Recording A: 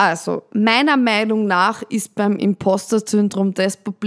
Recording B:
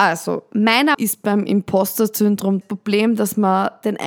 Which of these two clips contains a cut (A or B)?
B